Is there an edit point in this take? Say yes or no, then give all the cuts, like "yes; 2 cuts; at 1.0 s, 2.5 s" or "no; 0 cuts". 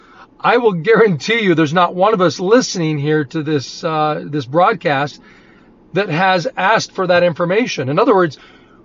no; 0 cuts